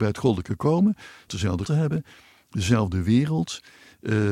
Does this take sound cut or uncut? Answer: cut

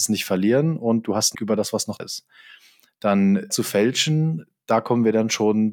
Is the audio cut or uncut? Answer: cut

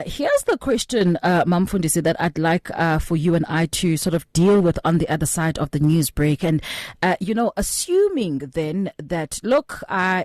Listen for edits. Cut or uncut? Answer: uncut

